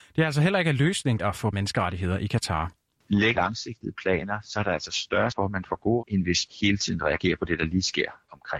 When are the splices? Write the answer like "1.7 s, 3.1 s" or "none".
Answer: 1.2 s, 1.5 s, 3.3 s, 5.3 s, 6.0 s, 6.5 s